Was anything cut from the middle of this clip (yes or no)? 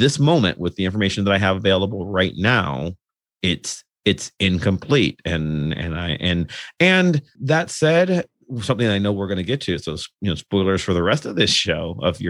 no